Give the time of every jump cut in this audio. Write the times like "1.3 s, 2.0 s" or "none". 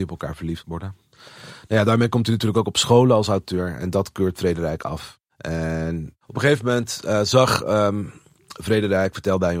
5.3 s